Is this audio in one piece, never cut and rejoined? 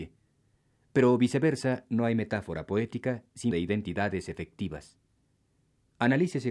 no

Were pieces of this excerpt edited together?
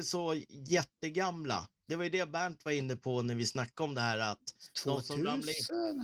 no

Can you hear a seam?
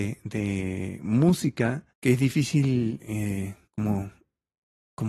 yes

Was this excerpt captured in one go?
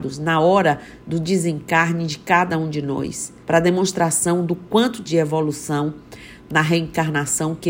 no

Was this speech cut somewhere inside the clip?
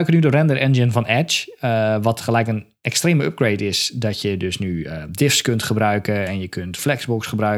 no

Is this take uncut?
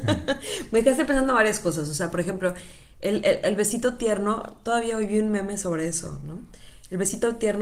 yes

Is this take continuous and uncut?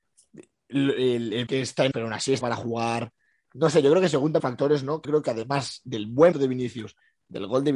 no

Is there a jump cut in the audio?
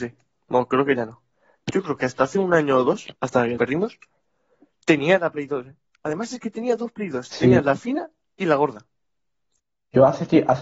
yes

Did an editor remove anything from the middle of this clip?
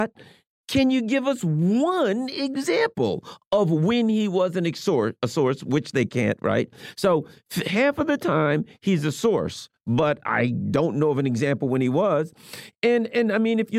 no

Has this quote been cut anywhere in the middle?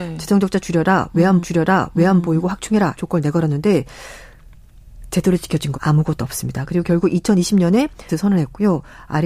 yes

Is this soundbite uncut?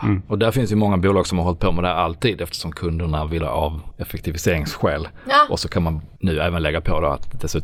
no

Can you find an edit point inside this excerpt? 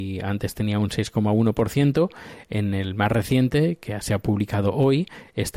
no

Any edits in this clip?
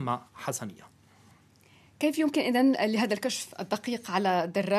no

